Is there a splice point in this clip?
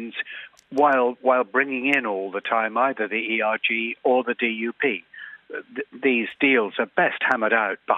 no; 0 cuts

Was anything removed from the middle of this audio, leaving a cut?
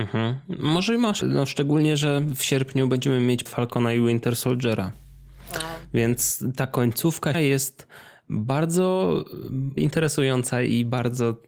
yes; 4 cuts; at 1.2 s, 3.5 s, 7.3 s, 9.8 s

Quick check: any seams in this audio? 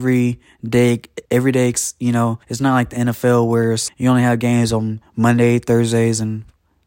yes; 3 cuts; at 1.3 s, 2.4 s, 3.9 s

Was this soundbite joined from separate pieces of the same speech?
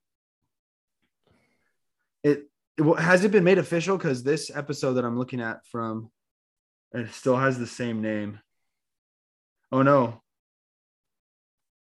no; 0 cuts

